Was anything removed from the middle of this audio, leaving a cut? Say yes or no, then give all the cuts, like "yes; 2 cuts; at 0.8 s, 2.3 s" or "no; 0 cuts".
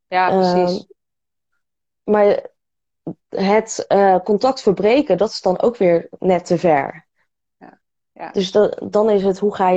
no; 0 cuts